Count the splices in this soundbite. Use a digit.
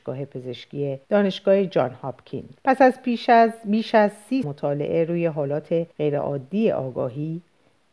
4